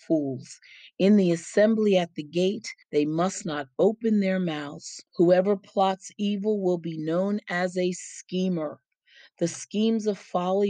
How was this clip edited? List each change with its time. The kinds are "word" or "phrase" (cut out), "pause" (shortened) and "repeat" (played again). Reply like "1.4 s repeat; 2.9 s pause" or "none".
2.8 s pause; 5.1 s pause